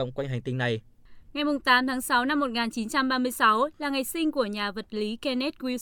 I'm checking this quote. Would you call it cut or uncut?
uncut